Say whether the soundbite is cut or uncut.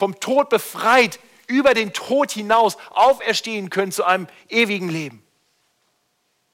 uncut